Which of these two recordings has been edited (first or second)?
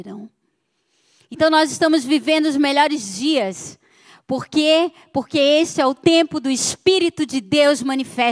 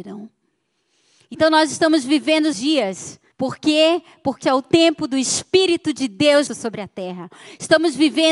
second